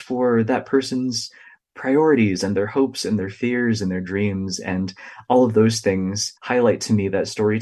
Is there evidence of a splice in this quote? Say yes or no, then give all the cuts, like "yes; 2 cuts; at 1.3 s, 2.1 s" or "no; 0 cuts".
yes; 1 cut; at 6.4 s